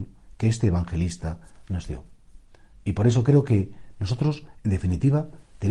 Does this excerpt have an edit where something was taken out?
no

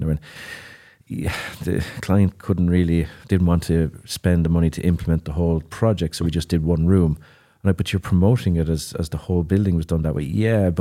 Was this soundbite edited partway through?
no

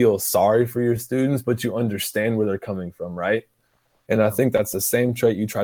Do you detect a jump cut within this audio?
no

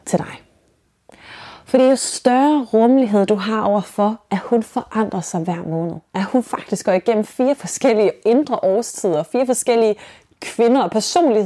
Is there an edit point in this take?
no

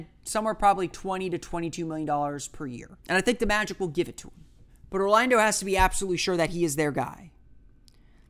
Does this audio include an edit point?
yes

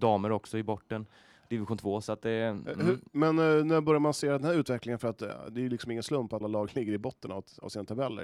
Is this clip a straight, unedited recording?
no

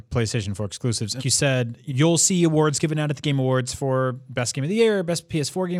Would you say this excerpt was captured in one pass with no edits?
no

